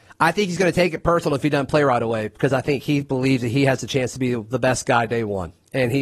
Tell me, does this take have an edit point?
no; 0 cuts

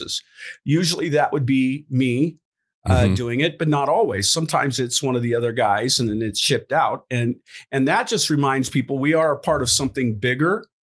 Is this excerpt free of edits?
yes; 0 cuts

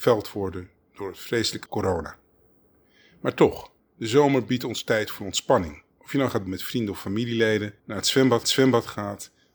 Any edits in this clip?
yes; 6 cuts; at 1.7 s, 3.8 s, 5.9 s, 6.5 s, 7.8 s, 8.4 s

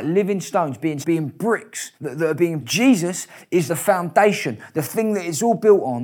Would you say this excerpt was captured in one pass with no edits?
no; 4 cuts; at 1.0 s, 2.0 s, 2.6 s, 3.7 s

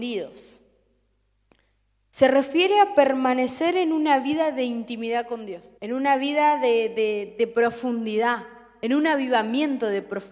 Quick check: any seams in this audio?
yes; 1 cut; at 5.8 s

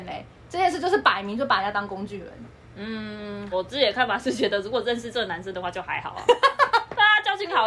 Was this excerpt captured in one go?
no; 1 cut; at 3.5 s

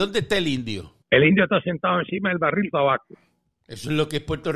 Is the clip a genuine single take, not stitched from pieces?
no; 2 cuts; at 1.0 s, 2.7 s

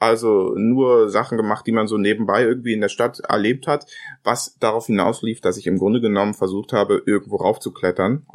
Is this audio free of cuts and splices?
yes; 0 cuts

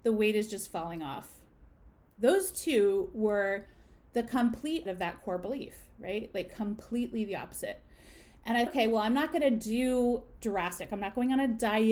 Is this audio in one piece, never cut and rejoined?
no; 3 cuts; at 4.9 s, 8.7 s, 10.4 s

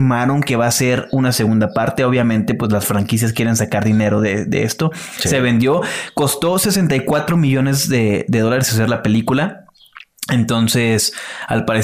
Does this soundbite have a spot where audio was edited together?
no; 0 cuts

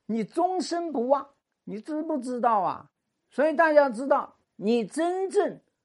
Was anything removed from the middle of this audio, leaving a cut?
yes; 1 cut; at 4.5 s

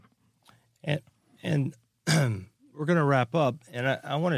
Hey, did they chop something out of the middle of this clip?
no; 0 cuts

